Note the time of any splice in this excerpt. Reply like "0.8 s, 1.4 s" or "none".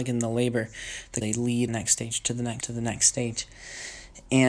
1.2 s, 1.7 s, 2.6 s